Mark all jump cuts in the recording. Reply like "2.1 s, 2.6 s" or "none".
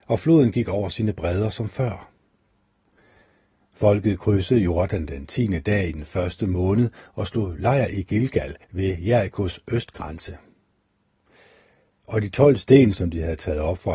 8.6 s

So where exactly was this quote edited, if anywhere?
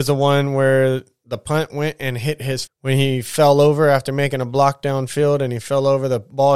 2.7 s

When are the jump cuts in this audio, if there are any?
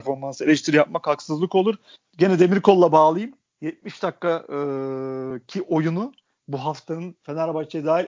none

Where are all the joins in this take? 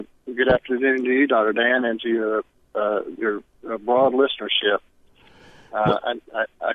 none

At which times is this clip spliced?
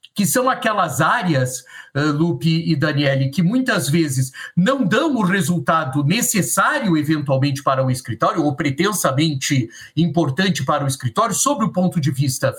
none

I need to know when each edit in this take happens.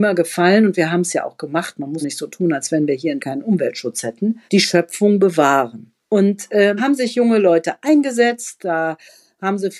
2.0 s, 3.2 s, 4.5 s, 6.0 s, 6.8 s

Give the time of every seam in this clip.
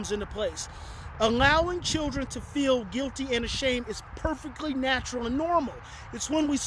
none

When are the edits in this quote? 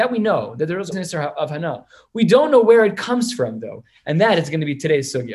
0.9 s

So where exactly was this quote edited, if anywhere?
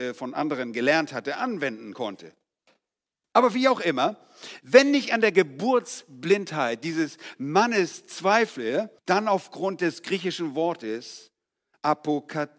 9.0 s

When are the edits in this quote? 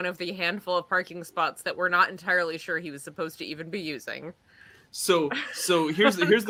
none

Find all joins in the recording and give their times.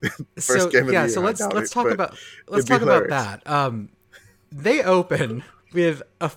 none

